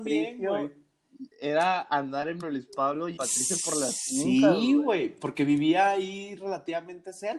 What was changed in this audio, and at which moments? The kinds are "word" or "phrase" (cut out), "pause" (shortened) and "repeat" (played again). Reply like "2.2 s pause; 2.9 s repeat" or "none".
1.3 s pause; 2.4 s phrase; 3.2 s word